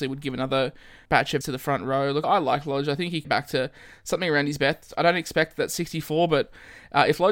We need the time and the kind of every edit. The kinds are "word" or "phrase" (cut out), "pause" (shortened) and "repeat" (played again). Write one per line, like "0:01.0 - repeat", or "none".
0:01.0 - word
0:01.4 - word
0:02.2 - word
0:03.2 - word